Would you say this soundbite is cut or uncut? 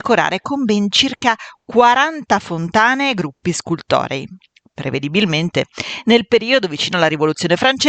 uncut